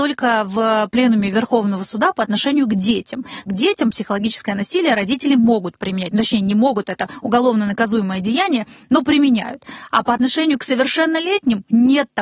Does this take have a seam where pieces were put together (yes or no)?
yes